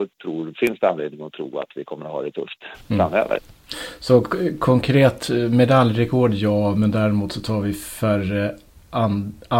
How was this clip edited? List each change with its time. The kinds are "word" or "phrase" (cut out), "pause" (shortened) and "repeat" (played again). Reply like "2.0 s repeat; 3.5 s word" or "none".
none